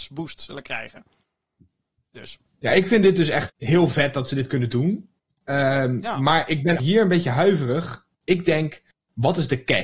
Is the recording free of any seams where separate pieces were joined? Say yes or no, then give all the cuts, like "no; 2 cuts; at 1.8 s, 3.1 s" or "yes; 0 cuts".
no; 2 cuts; at 3.5 s, 6.8 s